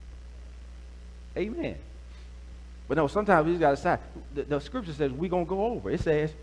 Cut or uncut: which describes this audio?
uncut